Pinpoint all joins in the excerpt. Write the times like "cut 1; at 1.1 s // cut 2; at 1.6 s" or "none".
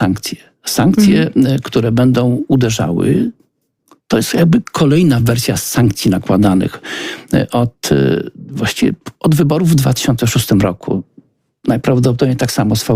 none